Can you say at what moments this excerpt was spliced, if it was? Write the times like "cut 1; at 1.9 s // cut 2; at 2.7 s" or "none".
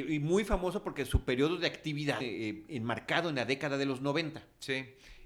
cut 1; at 2.2 s